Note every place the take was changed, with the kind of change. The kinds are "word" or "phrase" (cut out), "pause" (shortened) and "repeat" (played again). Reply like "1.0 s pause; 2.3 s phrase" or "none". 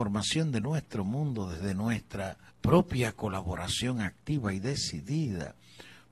2.5 s pause